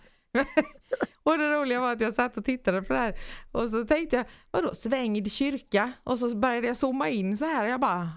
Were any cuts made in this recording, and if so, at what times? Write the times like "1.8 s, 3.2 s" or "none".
none